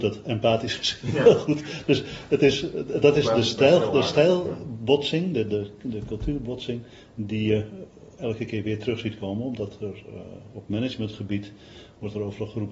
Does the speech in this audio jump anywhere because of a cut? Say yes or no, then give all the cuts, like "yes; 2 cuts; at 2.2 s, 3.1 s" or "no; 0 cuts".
no; 0 cuts